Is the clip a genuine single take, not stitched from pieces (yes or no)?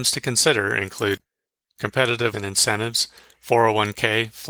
no